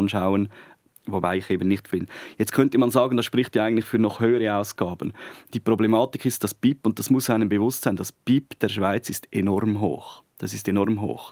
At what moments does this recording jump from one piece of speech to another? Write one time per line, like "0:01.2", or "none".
0:01.9

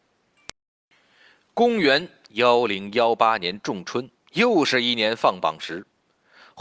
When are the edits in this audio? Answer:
0:04.1

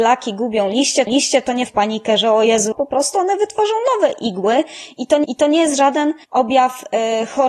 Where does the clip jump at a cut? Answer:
0:01.1
0:01.7
0:02.7
0:05.2
0:06.2

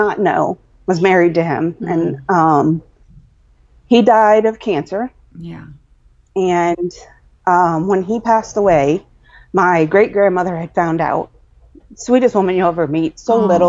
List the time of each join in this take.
none

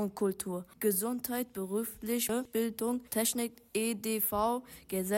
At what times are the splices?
0:03.1

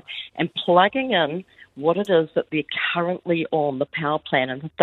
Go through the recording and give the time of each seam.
none

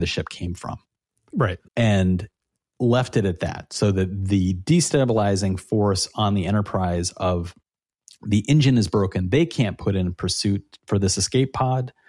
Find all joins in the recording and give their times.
0:01.7

